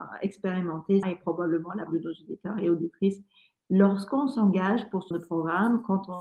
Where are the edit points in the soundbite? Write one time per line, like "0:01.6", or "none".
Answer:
0:01.0
0:01.9
0:05.1